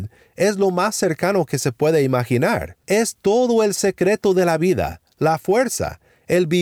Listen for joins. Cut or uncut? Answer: cut